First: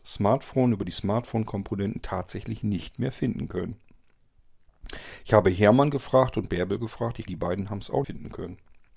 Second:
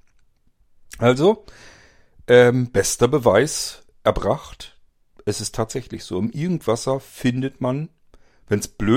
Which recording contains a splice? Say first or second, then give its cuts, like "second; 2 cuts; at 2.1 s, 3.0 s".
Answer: first; 2 cuts; at 7.3 s, 8.0 s